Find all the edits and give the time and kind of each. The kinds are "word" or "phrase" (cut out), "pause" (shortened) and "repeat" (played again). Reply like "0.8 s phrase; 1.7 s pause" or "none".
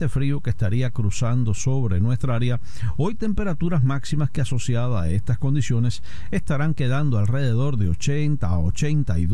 none